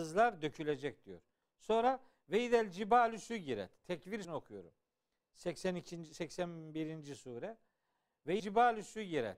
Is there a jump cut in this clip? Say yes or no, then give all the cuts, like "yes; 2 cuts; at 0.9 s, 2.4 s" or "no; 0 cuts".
yes; 2 cuts; at 4.2 s, 8.4 s